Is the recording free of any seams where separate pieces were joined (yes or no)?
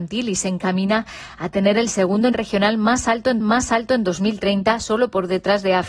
no